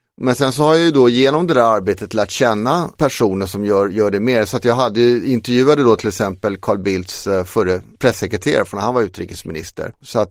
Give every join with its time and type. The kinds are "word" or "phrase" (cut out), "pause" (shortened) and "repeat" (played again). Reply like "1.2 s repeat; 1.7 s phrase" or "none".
none